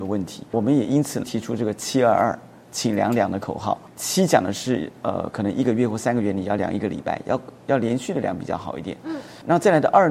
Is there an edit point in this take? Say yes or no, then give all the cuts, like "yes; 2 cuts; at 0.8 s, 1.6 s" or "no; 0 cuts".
no; 0 cuts